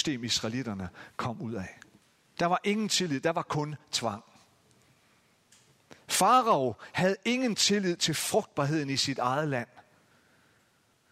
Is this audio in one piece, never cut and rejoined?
yes; 0 cuts

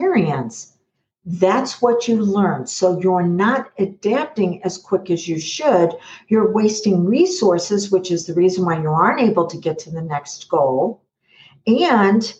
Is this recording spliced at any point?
no; 0 cuts

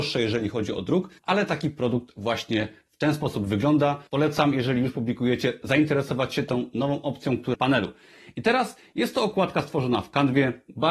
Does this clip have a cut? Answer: yes; 3 cuts; at 1.2 s, 4.1 s, 7.5 s

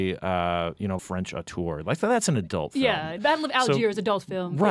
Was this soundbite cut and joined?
yes; 2 cuts; at 1.0 s, 3.2 s

